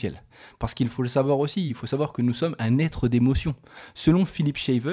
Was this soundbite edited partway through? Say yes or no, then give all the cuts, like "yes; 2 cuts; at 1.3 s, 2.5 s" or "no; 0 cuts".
no; 0 cuts